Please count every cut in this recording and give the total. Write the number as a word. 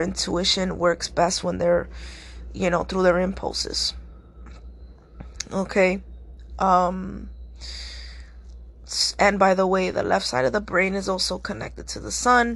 zero